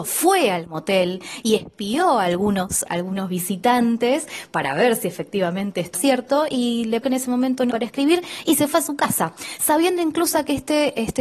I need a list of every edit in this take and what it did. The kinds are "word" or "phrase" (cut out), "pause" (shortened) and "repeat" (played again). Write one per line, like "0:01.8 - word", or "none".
0:05.9 - word
0:07.0 - word
0:07.7 - word

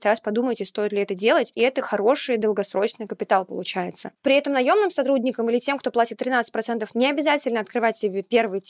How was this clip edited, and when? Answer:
0:06.9 - word

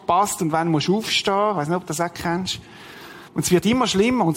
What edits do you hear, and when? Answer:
0:03.3 - pause

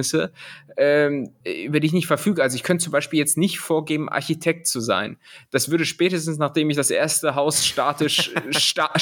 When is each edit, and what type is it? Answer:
0:01.4 - pause

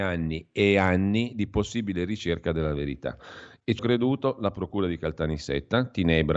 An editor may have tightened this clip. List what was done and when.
0:03.8 - word

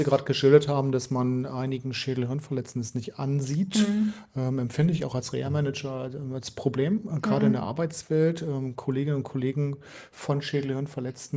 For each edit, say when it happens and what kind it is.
none

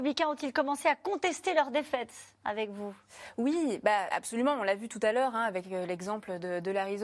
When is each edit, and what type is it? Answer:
0:02.3 - pause
0:04.1 - word

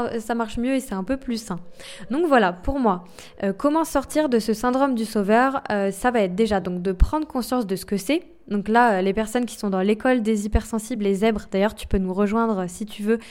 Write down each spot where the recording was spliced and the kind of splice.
none

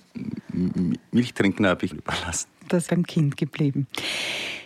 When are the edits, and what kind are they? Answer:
0:01.9 - phrase
0:02.9 - word

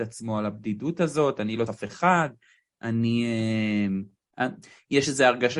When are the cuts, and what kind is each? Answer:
0:01.7 - word

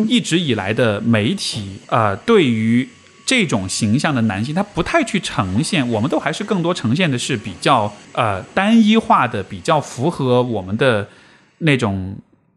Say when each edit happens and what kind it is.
0:01.8 - pause
0:08.0 - pause

